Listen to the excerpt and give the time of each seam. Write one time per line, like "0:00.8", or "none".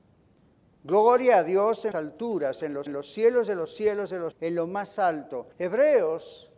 0:01.9
0:02.9
0:04.3
0:05.5